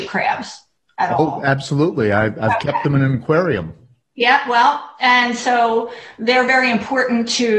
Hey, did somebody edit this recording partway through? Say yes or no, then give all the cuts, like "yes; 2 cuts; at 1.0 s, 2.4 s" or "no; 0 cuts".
no; 0 cuts